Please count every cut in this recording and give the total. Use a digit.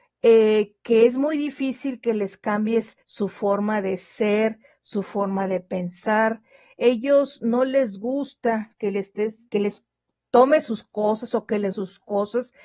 3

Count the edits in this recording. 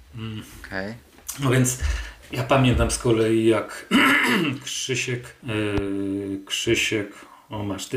1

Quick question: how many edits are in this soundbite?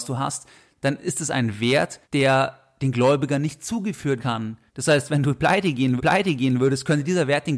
4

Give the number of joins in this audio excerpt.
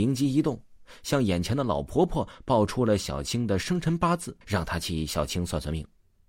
1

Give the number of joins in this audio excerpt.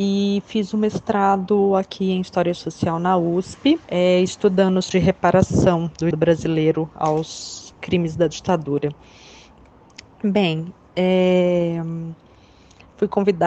3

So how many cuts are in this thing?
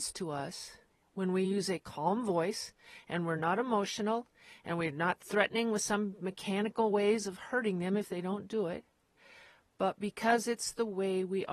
0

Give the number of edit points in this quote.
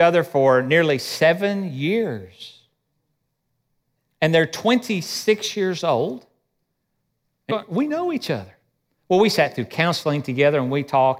1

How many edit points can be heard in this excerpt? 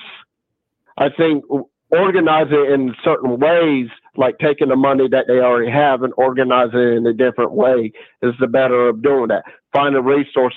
0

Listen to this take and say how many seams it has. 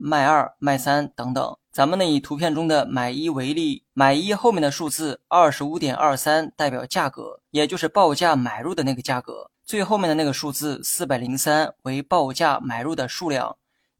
4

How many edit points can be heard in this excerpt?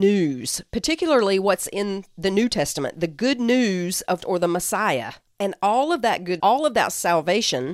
2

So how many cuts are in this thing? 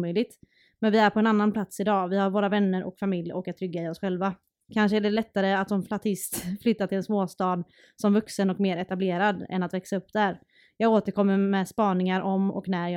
0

